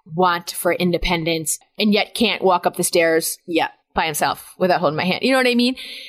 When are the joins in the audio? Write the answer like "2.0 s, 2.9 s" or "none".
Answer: none